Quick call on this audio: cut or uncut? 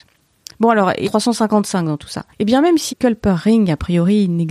cut